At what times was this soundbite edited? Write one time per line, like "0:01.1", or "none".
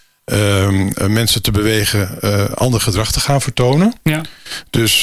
none